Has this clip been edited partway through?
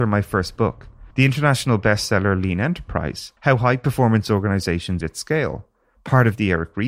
yes; 3 cuts; at 1.1 s, 3.4 s, 5.0 s

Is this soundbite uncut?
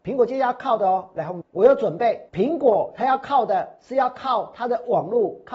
no; 2 cuts; at 1.4 s, 2.3 s

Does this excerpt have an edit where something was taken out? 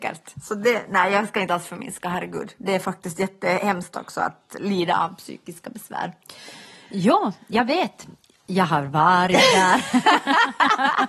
no; 0 cuts

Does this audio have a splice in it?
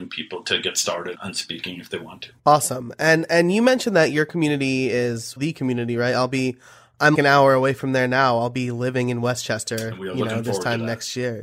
yes; 4 cuts; at 1.1 s, 2.4 s, 5.4 s, 7.1 s

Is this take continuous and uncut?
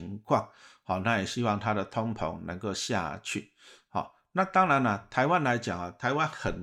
yes; 0 cuts

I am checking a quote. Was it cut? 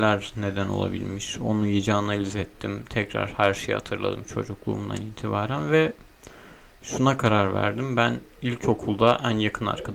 no; 0 cuts

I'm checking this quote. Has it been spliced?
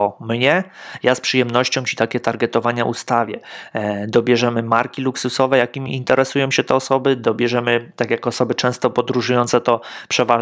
no; 0 cuts

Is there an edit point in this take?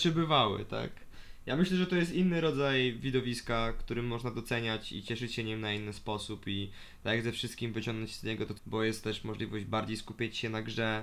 yes; 1 cut; at 8.6 s

